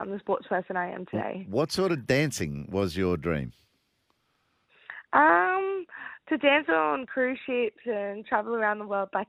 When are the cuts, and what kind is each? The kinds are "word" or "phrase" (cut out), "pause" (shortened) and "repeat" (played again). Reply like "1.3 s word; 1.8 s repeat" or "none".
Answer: none